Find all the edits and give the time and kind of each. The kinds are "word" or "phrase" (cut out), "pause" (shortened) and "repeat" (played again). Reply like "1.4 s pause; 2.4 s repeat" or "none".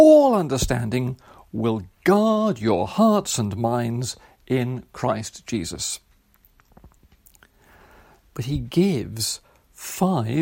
none